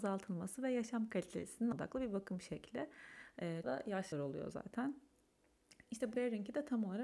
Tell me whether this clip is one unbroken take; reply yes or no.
no